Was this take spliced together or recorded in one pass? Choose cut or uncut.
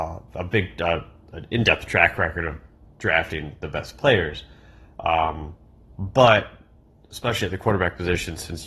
uncut